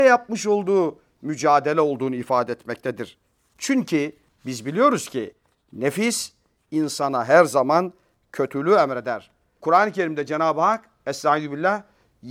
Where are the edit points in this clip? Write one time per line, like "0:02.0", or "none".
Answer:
none